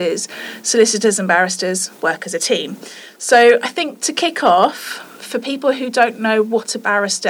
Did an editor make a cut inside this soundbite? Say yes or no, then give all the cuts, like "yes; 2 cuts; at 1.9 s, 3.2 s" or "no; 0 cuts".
yes; 1 cut; at 2.0 s